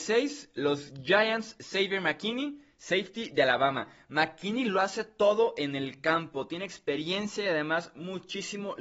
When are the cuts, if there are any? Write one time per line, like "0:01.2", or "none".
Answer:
none